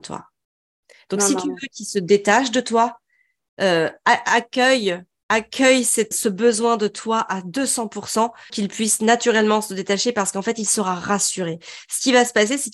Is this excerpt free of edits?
no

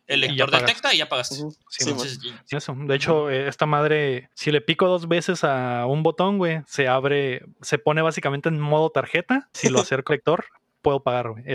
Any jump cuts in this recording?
yes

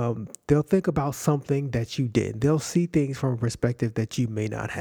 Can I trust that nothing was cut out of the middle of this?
yes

